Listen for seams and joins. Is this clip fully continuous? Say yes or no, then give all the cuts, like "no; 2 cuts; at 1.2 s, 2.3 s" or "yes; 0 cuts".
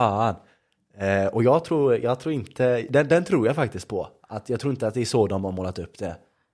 yes; 0 cuts